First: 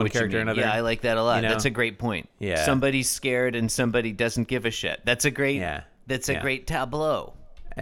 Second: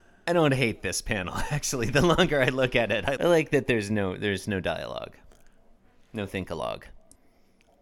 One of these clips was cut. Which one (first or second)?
second